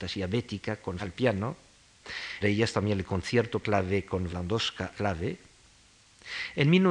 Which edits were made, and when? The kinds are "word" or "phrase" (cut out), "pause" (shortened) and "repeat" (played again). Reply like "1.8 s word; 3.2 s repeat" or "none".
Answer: 1.0 s word; 2.4 s word; 3.6 s word; 4.3 s word; 4.9 s word